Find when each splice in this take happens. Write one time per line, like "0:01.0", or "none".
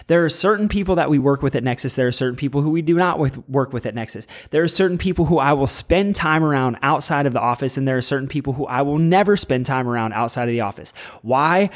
none